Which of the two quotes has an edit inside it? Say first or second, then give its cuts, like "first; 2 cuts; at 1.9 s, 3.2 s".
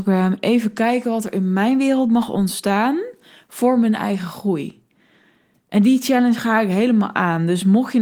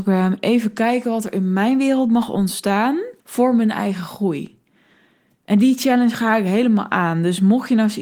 second; 1 cut; at 3.2 s